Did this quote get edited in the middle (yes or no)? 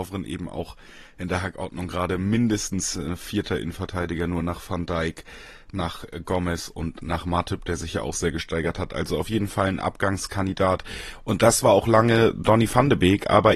no